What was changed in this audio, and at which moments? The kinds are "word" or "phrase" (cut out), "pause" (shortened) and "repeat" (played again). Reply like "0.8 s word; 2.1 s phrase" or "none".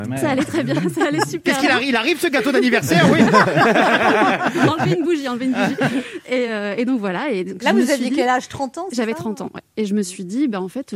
none